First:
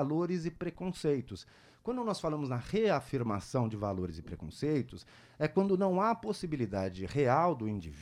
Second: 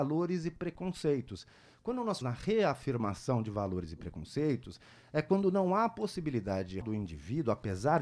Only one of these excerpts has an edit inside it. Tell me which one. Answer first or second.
second